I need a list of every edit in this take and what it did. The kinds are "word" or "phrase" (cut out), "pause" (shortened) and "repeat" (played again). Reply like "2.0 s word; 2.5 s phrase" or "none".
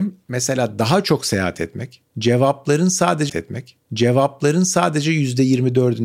3.3 s repeat

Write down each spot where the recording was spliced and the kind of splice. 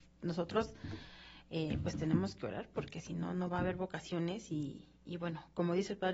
none

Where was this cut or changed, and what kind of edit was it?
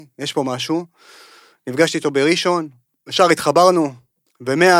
none

